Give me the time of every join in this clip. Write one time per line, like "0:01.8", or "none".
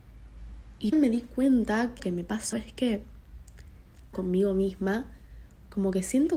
0:00.9
0:02.0
0:02.5
0:04.1